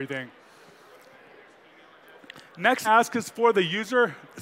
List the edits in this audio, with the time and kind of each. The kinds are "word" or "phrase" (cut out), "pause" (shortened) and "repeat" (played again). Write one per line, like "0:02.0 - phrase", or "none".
0:02.8 - phrase